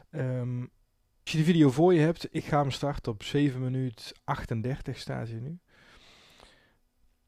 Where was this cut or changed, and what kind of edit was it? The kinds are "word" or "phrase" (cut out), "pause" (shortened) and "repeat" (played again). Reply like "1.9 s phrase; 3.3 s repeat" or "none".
1.3 s word